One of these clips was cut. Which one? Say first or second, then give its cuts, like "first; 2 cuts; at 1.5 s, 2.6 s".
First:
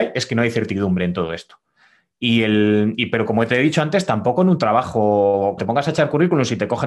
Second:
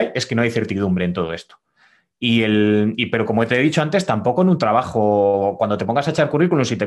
first; 1 cut; at 5.6 s